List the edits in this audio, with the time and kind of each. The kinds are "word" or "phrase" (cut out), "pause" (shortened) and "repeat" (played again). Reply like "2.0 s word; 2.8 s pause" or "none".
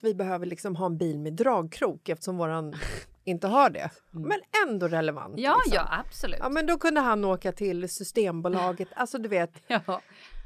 none